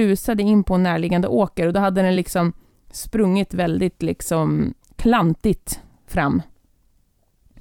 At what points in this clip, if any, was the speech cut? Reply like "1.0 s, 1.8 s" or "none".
none